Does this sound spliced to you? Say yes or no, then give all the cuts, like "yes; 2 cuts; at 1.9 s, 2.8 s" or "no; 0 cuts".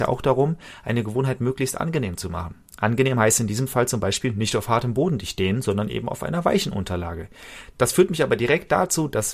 yes; 1 cut; at 2.6 s